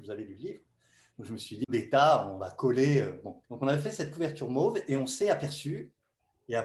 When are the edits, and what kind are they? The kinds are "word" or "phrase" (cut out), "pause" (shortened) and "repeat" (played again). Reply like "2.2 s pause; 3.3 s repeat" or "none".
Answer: 1.6 s phrase; 3.4 s pause